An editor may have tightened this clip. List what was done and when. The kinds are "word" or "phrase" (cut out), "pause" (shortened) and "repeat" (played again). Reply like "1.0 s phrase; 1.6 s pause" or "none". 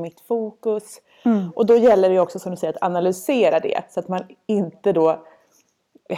none